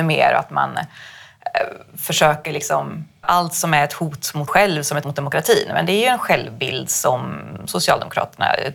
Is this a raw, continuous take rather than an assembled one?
no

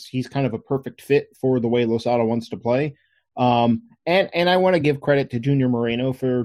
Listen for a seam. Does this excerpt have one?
no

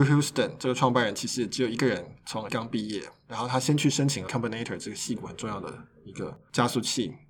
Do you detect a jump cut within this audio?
yes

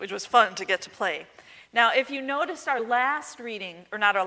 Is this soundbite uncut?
yes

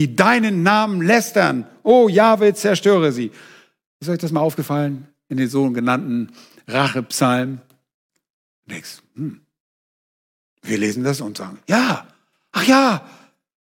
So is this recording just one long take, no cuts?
yes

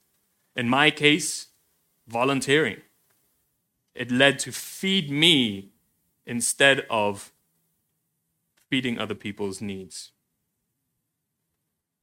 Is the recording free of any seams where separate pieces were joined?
yes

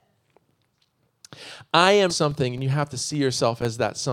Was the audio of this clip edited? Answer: yes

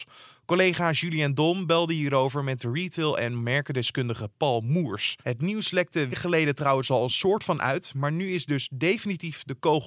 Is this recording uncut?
no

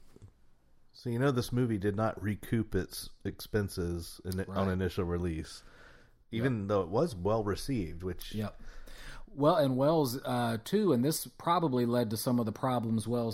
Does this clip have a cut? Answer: no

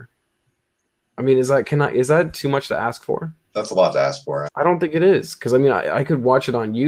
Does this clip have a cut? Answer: yes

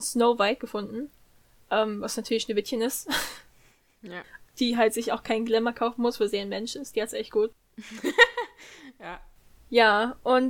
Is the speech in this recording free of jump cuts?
yes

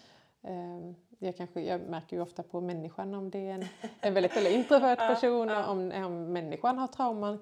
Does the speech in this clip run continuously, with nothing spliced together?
no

